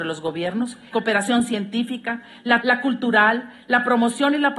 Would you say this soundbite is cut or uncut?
cut